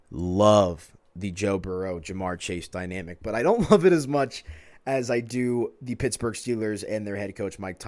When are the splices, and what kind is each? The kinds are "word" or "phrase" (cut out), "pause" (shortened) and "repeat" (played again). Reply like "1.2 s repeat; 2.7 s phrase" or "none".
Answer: none